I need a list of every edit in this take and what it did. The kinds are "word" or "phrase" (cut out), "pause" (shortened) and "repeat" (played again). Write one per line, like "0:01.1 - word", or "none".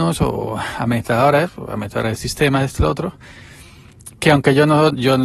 none